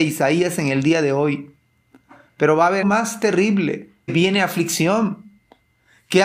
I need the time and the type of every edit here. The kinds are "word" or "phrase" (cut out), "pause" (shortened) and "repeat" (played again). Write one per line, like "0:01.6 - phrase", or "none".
0:02.8 - word
0:04.1 - word